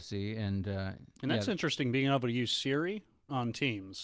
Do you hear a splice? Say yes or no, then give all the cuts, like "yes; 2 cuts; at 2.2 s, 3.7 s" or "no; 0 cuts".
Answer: no; 0 cuts